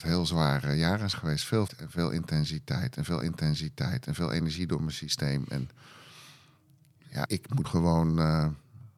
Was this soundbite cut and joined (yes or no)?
yes